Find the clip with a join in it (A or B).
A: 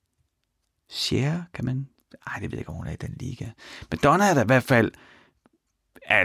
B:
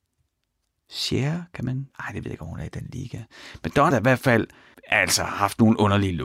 B